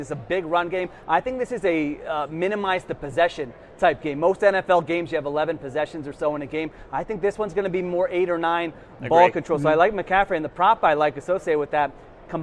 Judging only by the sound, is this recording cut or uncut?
uncut